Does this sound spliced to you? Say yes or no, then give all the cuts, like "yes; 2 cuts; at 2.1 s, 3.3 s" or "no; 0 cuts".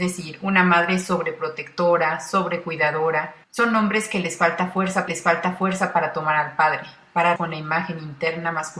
yes; 3 cuts; at 3.4 s, 5.1 s, 7.4 s